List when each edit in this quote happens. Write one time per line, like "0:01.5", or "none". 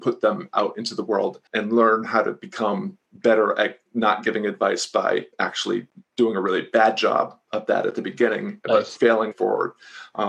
0:01.5
0:05.3
0:09.3

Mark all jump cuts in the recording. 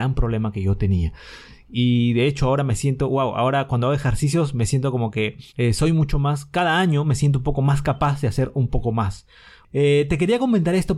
0:05.5

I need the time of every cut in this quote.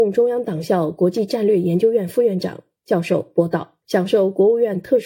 0:03.8

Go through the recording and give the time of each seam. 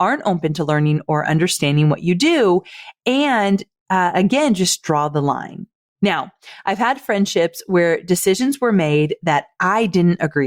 none

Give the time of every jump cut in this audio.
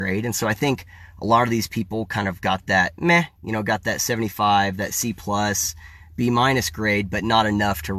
none

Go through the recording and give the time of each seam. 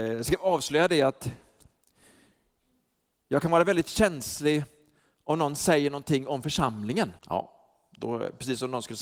0:07.2

